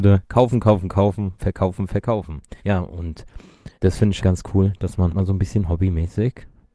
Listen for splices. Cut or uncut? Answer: cut